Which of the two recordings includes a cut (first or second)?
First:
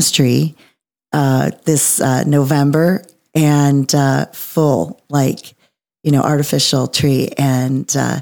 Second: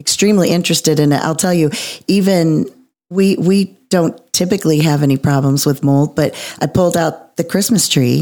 second